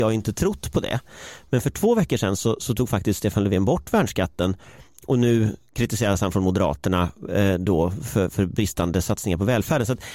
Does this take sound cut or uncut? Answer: uncut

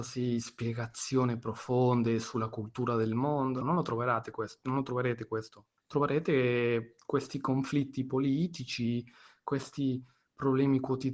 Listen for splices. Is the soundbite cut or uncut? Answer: cut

